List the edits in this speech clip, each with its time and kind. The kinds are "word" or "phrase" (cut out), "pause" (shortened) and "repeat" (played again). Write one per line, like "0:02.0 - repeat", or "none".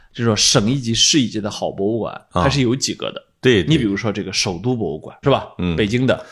0:05.2 - word